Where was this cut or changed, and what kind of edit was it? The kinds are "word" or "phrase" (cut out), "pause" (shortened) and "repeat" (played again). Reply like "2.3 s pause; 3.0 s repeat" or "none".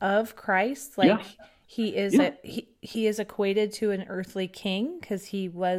none